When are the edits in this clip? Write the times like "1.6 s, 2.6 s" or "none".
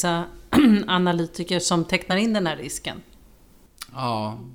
none